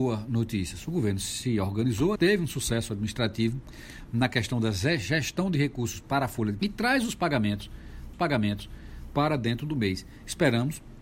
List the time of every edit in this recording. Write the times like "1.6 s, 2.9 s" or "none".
2.2 s, 6.6 s, 8.1 s